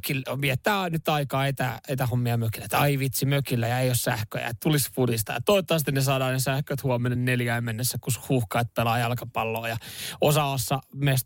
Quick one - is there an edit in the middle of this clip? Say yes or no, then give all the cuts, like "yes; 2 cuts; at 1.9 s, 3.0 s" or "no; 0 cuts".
no; 0 cuts